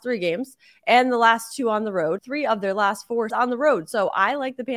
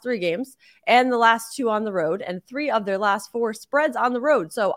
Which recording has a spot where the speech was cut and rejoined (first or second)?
first